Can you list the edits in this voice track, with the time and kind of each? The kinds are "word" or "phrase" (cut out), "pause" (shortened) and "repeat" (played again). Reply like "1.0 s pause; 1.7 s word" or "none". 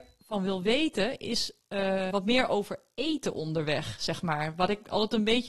2.1 s word